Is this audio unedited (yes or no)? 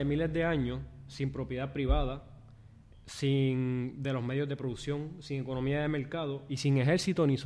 yes